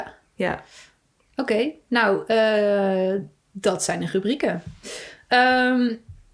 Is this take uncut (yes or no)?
yes